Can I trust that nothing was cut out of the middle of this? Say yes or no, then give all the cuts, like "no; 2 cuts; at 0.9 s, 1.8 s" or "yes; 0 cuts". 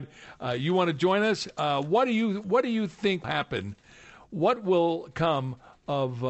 no; 1 cut; at 3.2 s